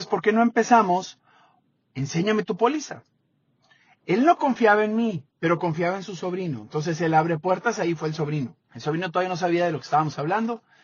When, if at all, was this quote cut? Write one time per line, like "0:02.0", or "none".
0:05.3
0:08.6